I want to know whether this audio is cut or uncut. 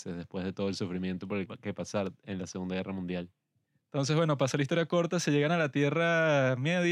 cut